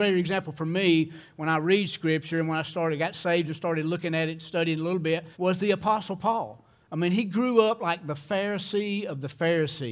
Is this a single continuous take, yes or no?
no